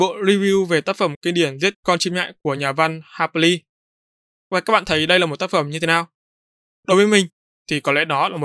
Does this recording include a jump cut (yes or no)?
no